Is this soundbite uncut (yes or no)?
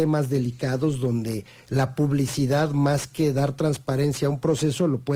yes